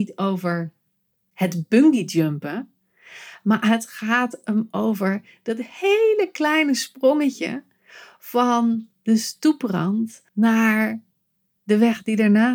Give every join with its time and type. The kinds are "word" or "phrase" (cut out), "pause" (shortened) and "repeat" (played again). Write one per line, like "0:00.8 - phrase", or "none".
0:10.3 - pause